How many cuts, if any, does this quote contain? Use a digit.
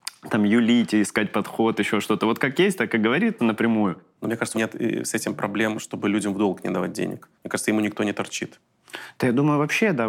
4